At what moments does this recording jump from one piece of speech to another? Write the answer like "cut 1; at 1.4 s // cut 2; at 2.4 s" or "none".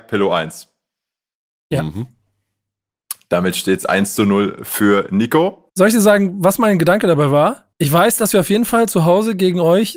cut 1; at 5.7 s // cut 2; at 7.7 s